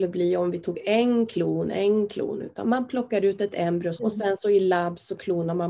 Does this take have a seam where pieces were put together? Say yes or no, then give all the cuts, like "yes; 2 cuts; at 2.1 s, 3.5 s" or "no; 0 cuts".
yes; 2 cuts; at 2.6 s, 4.0 s